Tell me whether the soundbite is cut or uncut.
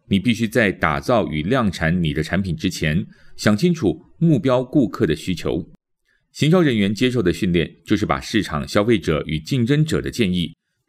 uncut